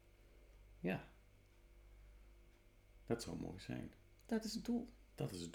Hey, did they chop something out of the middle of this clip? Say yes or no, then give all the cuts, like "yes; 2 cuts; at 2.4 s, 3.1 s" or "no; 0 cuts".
no; 0 cuts